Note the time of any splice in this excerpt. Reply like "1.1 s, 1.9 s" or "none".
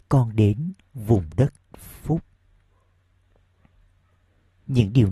1.7 s

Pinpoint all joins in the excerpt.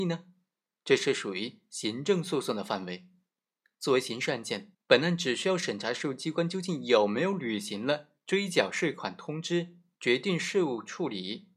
4.7 s

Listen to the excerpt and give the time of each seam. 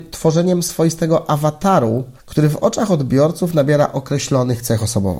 2.2 s

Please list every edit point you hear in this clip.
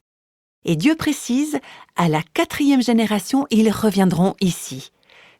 none

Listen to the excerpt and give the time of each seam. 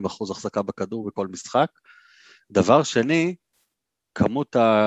none

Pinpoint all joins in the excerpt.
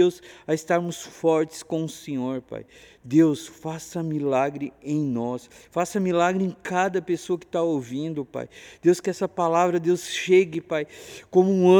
none

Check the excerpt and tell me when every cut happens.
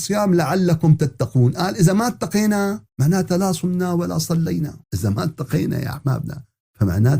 2.9 s, 4.8 s

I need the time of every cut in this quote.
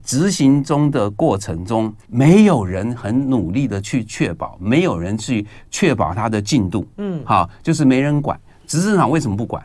2.0 s

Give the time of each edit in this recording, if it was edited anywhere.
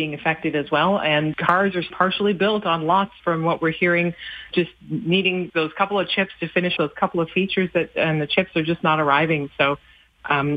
1.3 s, 1.9 s, 3.2 s, 4.5 s, 5.5 s, 6.8 s

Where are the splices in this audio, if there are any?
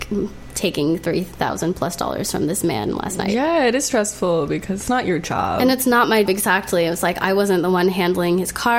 4.9 s, 6.3 s

